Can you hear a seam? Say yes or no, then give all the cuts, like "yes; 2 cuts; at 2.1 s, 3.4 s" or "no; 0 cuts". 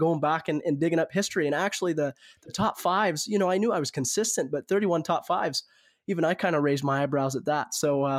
no; 0 cuts